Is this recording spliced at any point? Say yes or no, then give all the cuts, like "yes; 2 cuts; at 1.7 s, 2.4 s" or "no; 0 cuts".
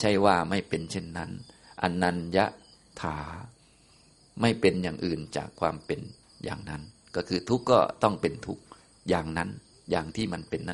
no; 0 cuts